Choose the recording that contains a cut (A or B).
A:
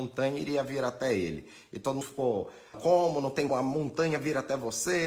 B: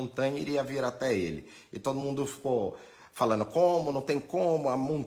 A